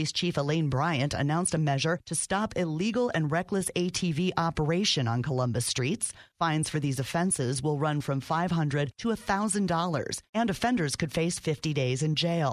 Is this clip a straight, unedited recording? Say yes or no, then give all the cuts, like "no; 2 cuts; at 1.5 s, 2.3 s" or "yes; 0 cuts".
yes; 0 cuts